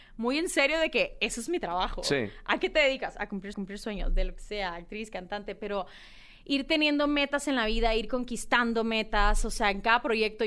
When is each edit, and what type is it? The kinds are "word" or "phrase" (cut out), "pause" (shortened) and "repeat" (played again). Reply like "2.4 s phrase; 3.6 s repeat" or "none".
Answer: 3.5 s repeat